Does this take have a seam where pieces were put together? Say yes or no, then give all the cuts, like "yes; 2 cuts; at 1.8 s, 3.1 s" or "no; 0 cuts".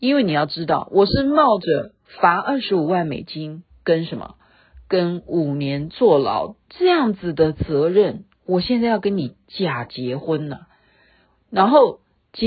no; 0 cuts